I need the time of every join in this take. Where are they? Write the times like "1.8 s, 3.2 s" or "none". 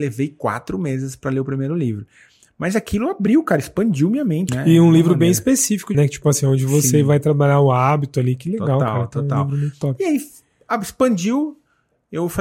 4.5 s, 5.9 s